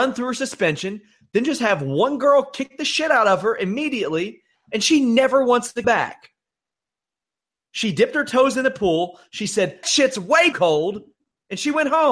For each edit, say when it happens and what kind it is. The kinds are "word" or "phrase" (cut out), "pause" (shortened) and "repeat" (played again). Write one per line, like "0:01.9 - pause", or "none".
0:05.8 - word
0:09.8 - word
0:10.5 - word